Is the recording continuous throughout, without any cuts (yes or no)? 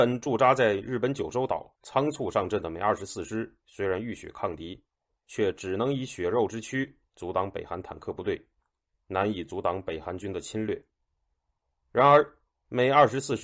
no